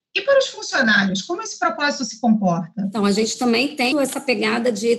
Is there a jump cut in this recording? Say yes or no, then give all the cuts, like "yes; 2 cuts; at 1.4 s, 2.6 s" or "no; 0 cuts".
yes; 1 cut; at 3.9 s